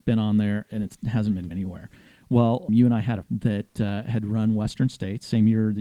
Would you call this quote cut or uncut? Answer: cut